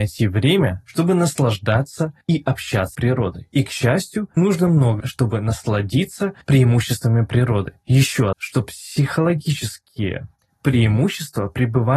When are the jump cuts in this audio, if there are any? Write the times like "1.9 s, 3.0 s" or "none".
2.2 s, 2.9 s, 4.4 s, 5.0 s, 6.4 s, 8.3 s